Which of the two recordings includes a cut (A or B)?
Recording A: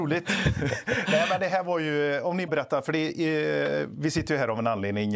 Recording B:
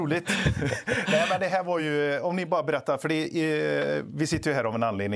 A